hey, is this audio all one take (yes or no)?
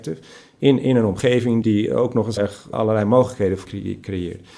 no